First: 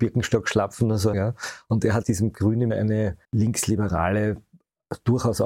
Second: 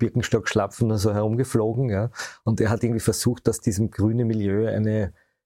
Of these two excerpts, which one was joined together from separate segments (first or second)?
first